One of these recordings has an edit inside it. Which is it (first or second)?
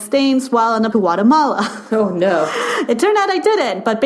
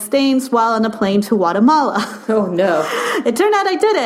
first